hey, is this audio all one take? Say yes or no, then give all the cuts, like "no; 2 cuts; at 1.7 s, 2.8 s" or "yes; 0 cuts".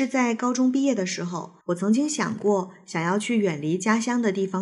no; 1 cut; at 1.6 s